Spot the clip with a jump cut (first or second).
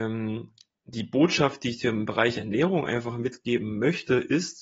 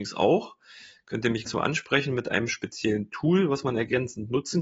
second